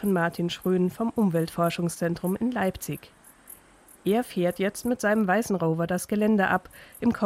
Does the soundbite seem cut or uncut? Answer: uncut